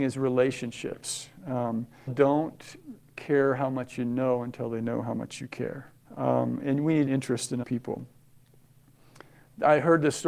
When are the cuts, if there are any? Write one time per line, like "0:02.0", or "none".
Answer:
0:02.1
0:06.0
0:07.1
0:07.6